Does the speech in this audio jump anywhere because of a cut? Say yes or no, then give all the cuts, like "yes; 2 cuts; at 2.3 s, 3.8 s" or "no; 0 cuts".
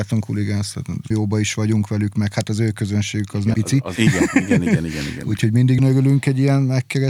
yes; 4 cuts; at 1.1 s, 3.5 s, 4.0 s, 5.8 s